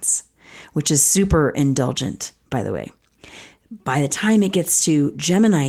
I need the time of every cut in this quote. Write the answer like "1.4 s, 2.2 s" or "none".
none